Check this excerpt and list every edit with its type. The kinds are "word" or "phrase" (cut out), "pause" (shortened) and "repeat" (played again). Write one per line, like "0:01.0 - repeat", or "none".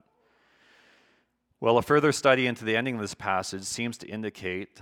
none